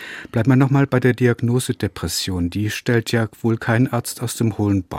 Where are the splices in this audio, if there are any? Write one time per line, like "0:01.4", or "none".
none